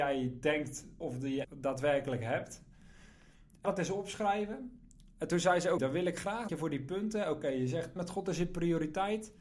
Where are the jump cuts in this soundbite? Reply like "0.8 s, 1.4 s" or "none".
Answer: 1.0 s, 1.4 s, 3.6 s, 5.8 s, 6.5 s, 8.0 s